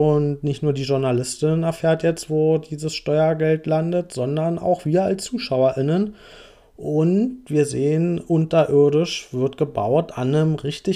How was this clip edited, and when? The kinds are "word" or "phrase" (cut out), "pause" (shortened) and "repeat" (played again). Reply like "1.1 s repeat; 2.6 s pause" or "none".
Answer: none